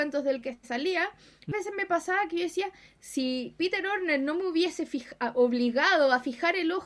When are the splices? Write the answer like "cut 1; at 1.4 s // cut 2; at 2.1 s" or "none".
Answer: cut 1; at 1.5 s

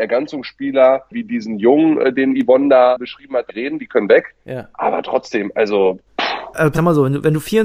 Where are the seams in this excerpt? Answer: cut 1; at 3.5 s // cut 2; at 6.7 s

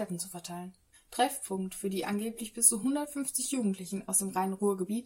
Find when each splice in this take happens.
cut 1; at 0.9 s

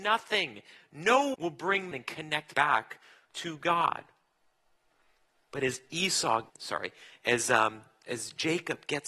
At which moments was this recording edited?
cut 1; at 1.3 s // cut 2; at 1.9 s // cut 3; at 2.5 s // cut 4; at 6.5 s

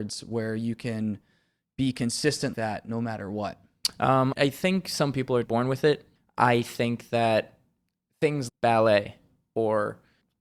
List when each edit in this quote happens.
cut 1; at 2.5 s // cut 2; at 4.3 s // cut 3; at 5.4 s // cut 4; at 8.5 s

